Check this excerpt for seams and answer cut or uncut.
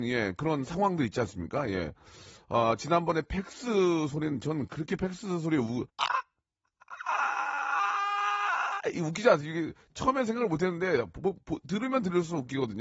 cut